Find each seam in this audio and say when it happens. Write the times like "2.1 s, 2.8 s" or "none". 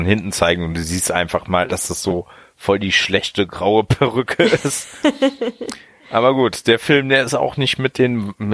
none

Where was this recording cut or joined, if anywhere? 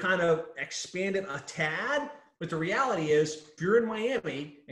3.6 s

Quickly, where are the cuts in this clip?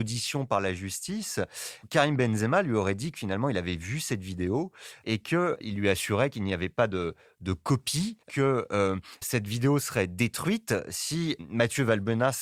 5.6 s, 8.2 s, 9.2 s

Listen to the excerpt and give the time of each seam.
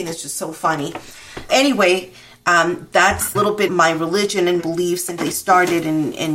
1.5 s, 3.3 s, 3.7 s, 4.6 s, 5.2 s

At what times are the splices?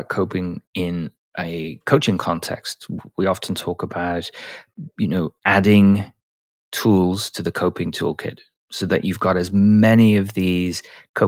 none

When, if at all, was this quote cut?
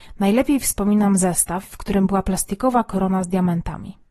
none

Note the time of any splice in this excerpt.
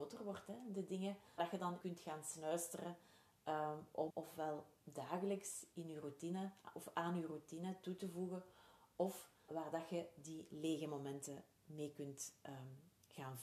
1.4 s, 1.8 s, 4.1 s, 9.5 s

